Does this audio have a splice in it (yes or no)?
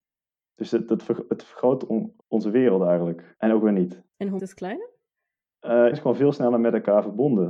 yes